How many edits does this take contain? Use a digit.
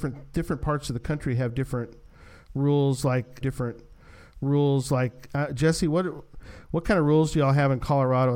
1